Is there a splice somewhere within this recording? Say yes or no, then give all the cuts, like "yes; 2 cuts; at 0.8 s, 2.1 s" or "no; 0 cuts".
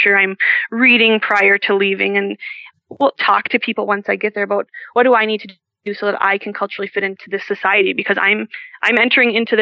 no; 0 cuts